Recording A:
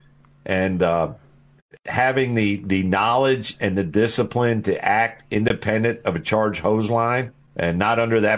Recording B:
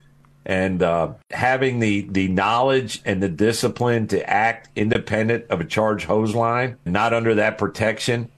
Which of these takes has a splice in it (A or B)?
B